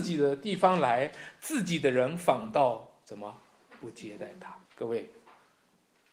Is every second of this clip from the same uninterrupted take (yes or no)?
no